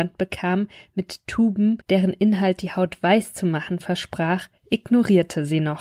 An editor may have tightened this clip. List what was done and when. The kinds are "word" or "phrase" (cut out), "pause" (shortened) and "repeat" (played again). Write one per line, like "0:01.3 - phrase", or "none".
0:01.8 - pause
0:04.6 - pause